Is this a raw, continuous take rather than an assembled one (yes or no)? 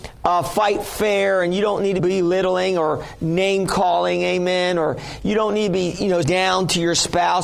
no